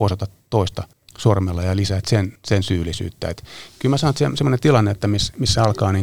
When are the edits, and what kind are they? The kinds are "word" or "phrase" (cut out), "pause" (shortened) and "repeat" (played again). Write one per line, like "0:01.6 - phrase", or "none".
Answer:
0:00.9 - pause
0:02.4 - pause